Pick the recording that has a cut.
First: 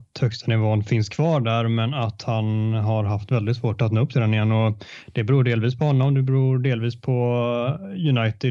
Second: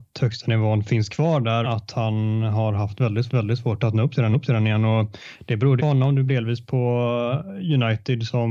second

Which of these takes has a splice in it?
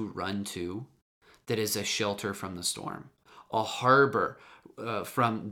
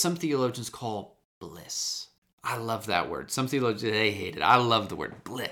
second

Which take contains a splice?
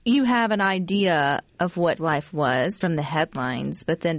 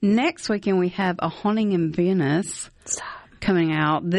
first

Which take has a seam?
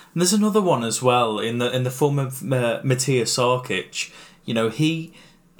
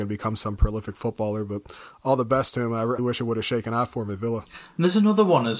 second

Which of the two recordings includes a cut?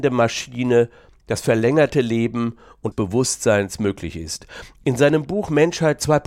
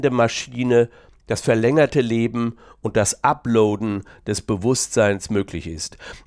first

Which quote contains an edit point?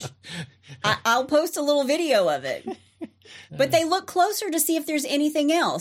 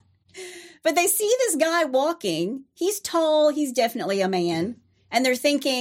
first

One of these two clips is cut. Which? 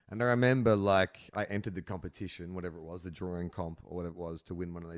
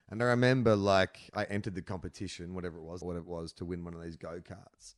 second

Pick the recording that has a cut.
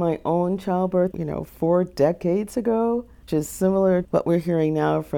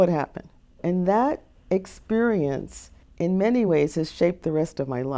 first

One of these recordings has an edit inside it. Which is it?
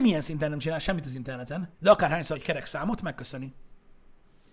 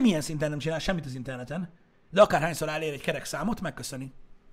first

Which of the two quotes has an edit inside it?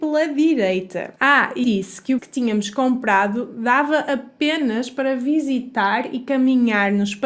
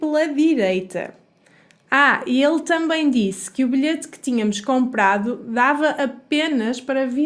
first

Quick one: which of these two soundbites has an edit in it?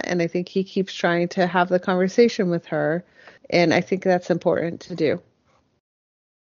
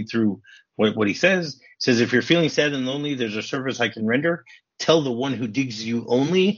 first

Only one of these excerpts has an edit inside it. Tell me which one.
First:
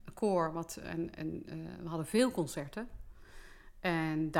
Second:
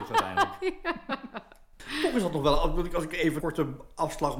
second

